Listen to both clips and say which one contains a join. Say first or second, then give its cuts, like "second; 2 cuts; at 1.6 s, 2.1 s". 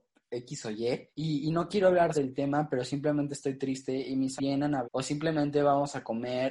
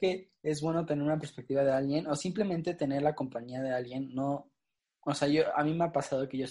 first; 4 cuts; at 1.1 s, 2.1 s, 4.4 s, 4.8 s